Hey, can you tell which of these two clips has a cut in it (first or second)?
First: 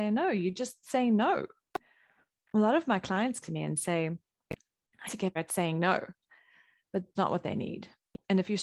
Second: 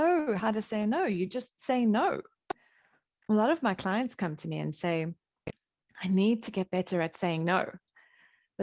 first